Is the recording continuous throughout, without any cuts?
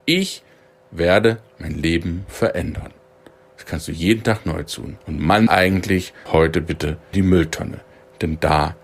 no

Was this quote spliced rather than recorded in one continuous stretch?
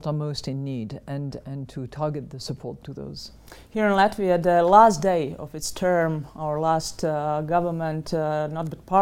no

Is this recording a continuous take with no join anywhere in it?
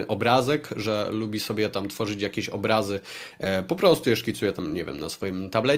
yes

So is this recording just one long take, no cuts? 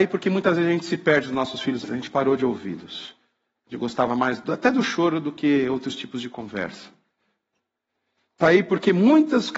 no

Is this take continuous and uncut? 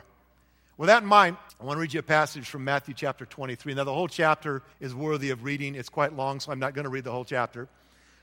no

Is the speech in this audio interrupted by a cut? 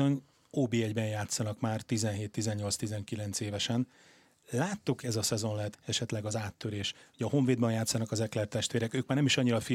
yes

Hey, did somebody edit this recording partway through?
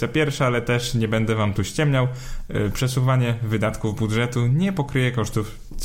no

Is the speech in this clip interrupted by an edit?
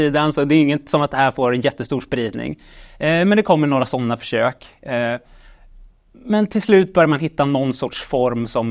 no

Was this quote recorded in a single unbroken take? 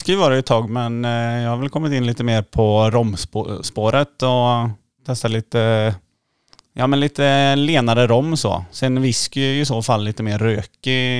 yes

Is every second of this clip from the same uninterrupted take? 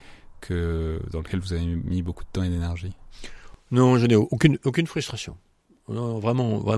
yes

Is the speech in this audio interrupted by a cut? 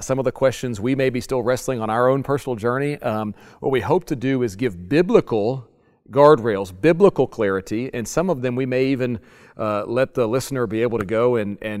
no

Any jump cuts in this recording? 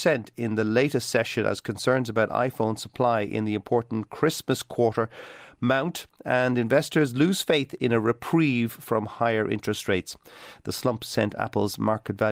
no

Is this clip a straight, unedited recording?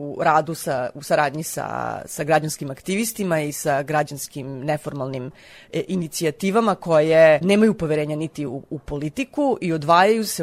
yes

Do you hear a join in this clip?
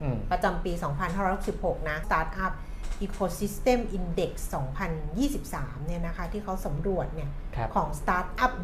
yes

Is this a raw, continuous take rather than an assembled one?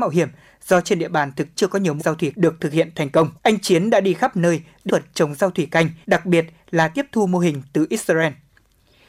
no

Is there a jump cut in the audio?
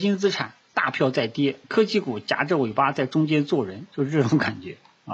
yes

